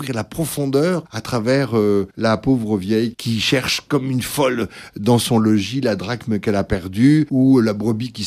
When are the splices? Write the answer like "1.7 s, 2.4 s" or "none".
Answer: none